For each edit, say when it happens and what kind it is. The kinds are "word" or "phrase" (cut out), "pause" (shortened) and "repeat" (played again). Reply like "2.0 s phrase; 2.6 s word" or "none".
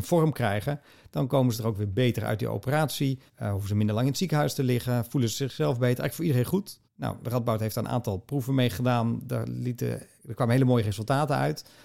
3.3 s pause; 6.8 s pause